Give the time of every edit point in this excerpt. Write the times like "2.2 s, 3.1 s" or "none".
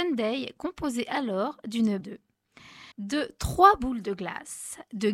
2.0 s, 2.9 s